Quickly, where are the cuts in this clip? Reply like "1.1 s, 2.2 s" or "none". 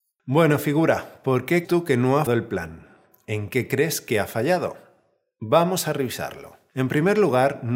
1.6 s, 2.3 s